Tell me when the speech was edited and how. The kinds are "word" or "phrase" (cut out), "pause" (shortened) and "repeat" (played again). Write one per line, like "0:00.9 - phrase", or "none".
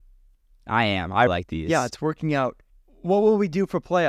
0:01.3 - word
0:02.7 - pause